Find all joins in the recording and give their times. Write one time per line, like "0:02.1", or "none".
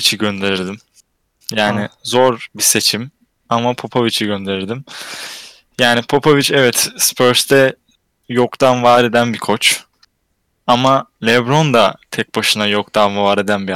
none